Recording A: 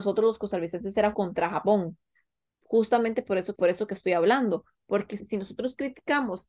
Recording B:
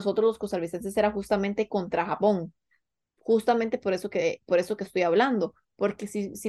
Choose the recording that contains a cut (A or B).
A